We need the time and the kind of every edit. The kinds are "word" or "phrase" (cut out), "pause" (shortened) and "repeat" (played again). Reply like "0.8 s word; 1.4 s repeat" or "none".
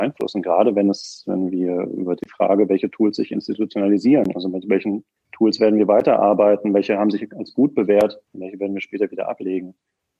2.2 s phrase; 5.2 s pause; 8.3 s pause